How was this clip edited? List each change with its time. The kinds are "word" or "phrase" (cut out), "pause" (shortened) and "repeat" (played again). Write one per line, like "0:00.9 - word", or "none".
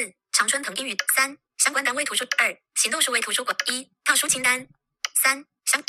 none